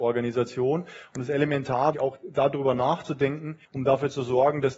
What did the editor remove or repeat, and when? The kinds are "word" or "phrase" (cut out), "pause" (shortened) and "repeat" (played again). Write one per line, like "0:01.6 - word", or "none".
0:01.9 - word
0:03.7 - pause